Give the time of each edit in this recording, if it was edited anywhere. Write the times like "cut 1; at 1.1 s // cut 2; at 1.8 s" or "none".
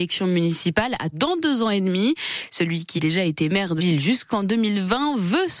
cut 1; at 1.1 s // cut 2; at 3.0 s // cut 3; at 3.8 s

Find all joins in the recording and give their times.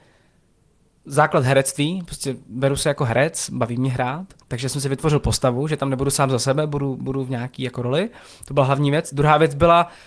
cut 1; at 4.4 s

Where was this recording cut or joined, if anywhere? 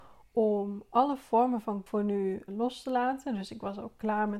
cut 1; at 1.9 s // cut 2; at 2.5 s

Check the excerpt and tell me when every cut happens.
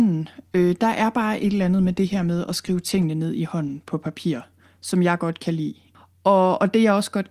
none

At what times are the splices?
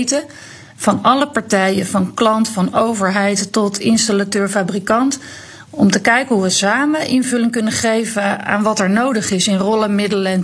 none

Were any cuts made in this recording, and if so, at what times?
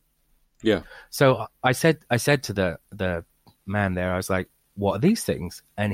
none

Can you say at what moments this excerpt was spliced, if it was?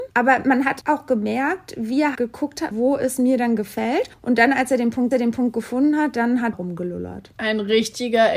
cut 1; at 2.1 s // cut 2; at 2.7 s // cut 3; at 5.1 s // cut 4; at 6.5 s

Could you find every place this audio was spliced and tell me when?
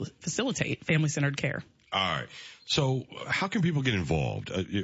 none

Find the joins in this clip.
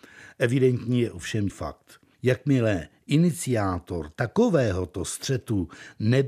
cut 1; at 1.5 s // cut 2; at 2.1 s

